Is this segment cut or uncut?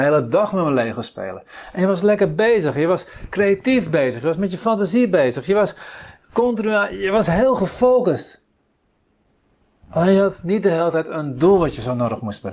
uncut